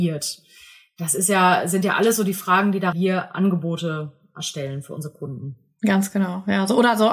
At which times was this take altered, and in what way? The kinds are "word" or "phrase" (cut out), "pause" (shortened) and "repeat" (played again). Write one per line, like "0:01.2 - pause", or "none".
0:02.9 - phrase